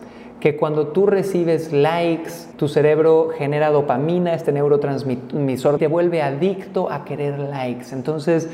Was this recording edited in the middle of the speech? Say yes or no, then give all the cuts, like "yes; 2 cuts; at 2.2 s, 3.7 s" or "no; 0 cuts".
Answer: yes; 2 cuts; at 2.5 s, 5.8 s